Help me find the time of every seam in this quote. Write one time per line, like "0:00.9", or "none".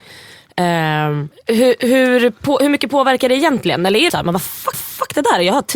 0:01.3
0:04.1
0:04.7